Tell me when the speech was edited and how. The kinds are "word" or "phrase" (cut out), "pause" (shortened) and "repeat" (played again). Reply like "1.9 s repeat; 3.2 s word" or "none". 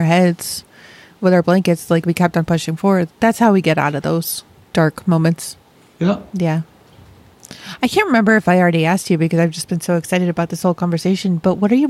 none